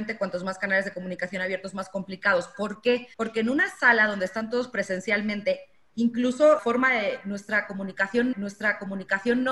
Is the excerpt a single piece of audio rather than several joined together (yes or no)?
no